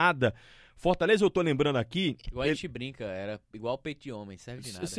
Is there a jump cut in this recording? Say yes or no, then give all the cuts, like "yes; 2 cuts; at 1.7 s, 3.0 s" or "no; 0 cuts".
no; 0 cuts